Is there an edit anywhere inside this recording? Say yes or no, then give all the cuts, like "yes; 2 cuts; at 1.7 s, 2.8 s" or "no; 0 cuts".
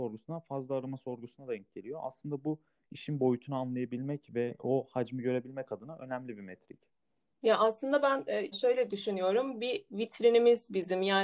yes; 1 cut; at 8.5 s